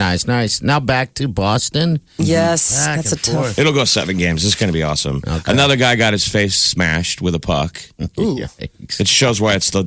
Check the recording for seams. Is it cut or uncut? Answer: uncut